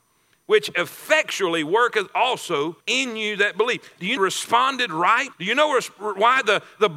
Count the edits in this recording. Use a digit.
3